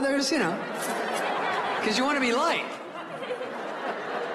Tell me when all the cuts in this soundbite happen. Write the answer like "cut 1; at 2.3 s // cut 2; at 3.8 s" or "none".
none